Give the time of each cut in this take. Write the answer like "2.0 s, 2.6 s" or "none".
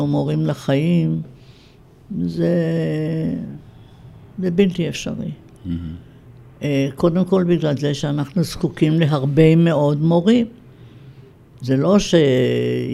11.3 s